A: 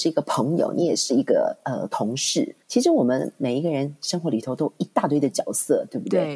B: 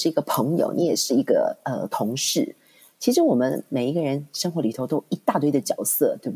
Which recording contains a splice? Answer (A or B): A